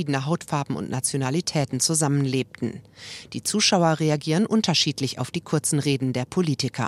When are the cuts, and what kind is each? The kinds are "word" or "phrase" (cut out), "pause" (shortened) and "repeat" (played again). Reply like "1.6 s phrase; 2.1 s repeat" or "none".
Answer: none